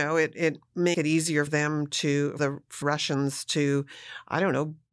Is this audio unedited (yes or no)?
no